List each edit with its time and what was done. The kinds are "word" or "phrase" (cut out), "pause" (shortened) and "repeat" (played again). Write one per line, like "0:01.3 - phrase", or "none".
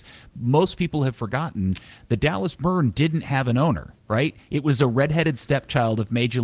0:04.0 - pause